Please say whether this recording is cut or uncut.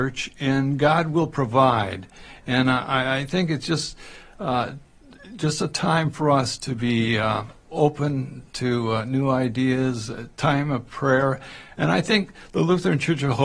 uncut